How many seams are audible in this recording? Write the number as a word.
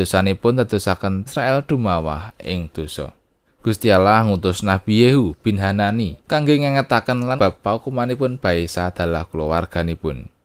four